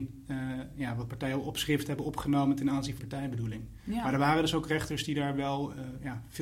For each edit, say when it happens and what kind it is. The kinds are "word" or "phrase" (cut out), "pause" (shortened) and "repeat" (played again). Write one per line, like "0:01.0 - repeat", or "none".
0:03.0 - word